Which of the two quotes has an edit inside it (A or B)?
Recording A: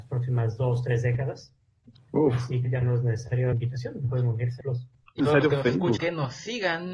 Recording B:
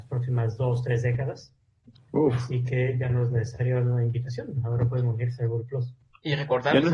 A